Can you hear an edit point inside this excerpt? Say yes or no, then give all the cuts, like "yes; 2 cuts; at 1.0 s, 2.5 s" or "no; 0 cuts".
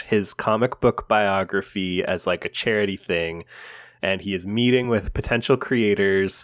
no; 0 cuts